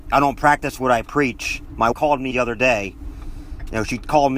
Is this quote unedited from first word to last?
no; 2 cuts; at 1.9 s, 2.3 s

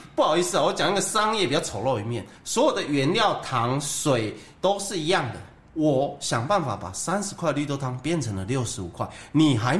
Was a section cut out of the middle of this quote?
no; 0 cuts

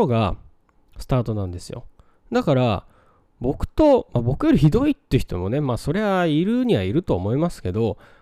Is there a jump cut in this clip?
no; 0 cuts

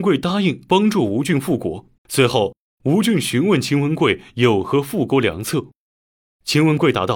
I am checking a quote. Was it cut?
yes; 1 cut; at 2.0 s

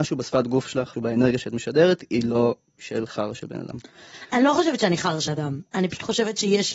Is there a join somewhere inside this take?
yes; 2 cuts; at 0.9 s, 5.3 s

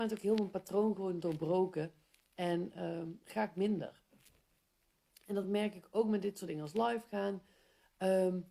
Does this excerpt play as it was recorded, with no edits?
yes; 0 cuts

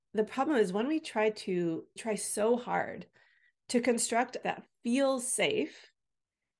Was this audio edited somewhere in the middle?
yes; 2 cuts; at 2.0 s, 4.4 s

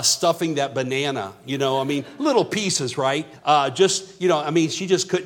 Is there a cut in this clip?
yes; 1 cut; at 3.4 s

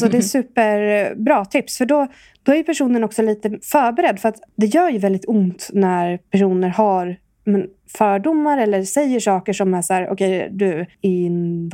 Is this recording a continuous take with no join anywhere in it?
yes; 0 cuts

